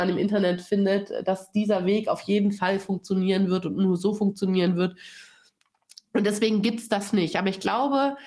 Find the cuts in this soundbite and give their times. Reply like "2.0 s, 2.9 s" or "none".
none